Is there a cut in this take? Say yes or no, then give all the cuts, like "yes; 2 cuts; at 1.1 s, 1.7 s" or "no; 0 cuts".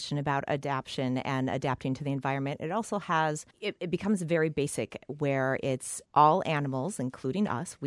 yes; 2 cuts; at 3.5 s, 6.1 s